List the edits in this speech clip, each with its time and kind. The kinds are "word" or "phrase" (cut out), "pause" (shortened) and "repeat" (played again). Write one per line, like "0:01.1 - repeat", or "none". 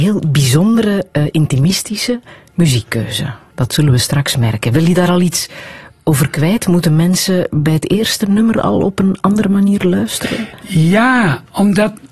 none